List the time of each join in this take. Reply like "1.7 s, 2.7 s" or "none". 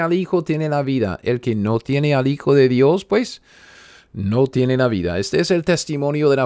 none